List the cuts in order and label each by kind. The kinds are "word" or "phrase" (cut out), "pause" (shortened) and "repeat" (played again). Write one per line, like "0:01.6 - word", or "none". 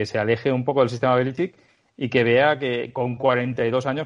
none